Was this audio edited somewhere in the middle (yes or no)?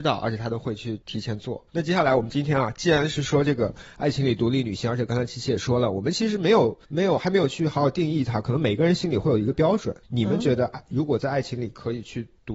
yes